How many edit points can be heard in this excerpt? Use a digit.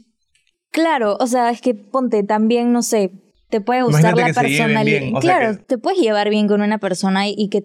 2